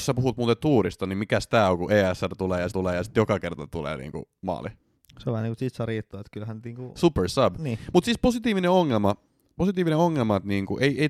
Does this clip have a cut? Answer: yes; 1 cut; at 2.7 s

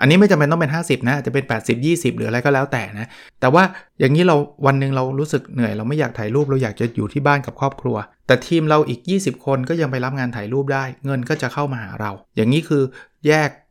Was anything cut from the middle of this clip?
yes; 4 cuts; at 3.3 s, 3.9 s, 8.1 s, 12.2 s

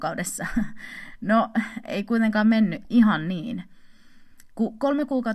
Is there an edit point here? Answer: no; 0 cuts

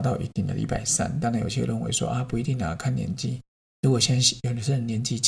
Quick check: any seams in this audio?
no; 0 cuts

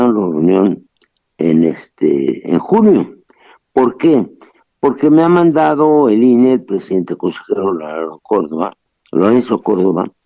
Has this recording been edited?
no; 0 cuts

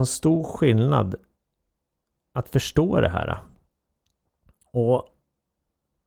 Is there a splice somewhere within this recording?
no; 0 cuts

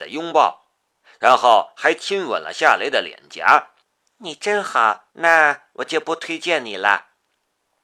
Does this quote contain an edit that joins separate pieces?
yes; 2 cuts; at 3.8 s, 5.1 s

